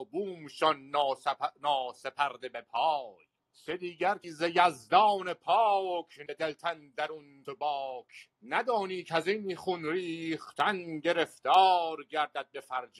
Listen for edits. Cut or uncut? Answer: cut